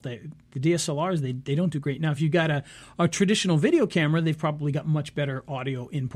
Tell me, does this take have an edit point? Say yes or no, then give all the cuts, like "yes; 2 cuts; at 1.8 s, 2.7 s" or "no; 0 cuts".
no; 0 cuts